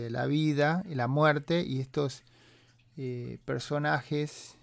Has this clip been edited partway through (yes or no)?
no